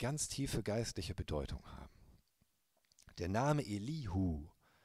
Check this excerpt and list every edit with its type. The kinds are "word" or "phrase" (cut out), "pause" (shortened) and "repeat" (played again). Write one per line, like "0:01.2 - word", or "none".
none